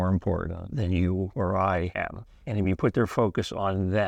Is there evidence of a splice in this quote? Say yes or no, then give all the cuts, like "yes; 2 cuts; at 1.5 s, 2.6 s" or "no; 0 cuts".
no; 0 cuts